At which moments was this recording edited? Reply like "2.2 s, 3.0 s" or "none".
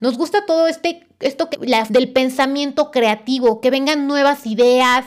1.5 s, 1.9 s